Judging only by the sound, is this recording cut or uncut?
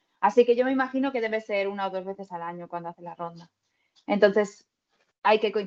uncut